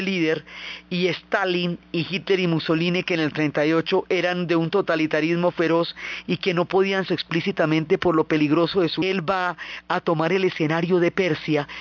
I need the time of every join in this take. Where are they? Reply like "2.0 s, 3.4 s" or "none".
7.1 s, 9.0 s